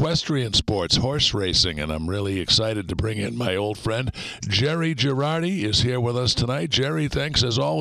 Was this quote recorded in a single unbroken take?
yes; 0 cuts

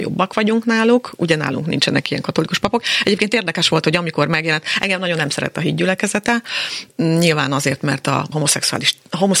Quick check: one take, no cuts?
no; 1 cut; at 8.3 s

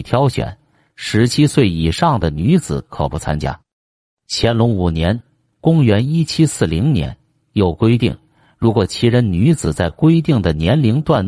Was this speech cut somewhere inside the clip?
no; 0 cuts

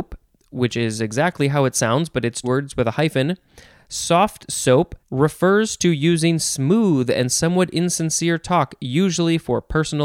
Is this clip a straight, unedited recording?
no; 2 cuts; at 2.4 s, 5.0 s

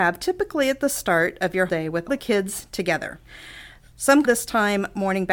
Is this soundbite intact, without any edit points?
no; 3 cuts; at 1.7 s, 2.1 s, 4.2 s

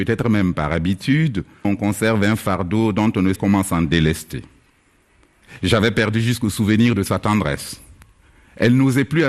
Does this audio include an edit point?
yes; 2 cuts; at 1.6 s, 3.4 s

